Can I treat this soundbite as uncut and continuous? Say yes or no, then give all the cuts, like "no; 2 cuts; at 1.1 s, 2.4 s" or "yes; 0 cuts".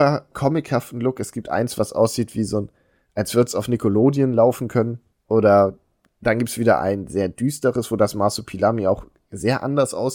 yes; 0 cuts